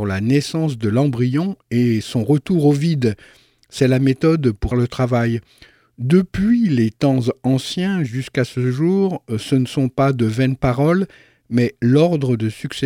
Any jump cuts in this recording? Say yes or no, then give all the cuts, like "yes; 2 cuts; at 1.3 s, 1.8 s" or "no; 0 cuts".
yes; 1 cut; at 4.7 s